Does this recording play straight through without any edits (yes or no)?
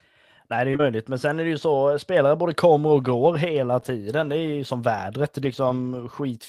no